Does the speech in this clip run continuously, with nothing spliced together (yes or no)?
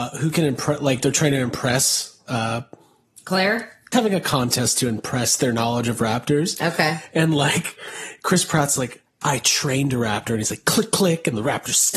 no